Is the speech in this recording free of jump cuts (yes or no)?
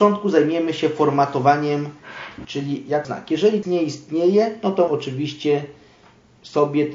no